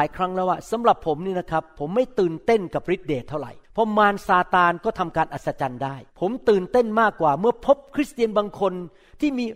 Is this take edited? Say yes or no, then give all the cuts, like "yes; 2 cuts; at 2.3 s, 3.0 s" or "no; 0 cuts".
yes; 2 cuts; at 3.6 s, 6.1 s